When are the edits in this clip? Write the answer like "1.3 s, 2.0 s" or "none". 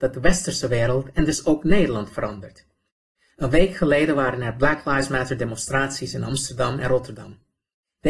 none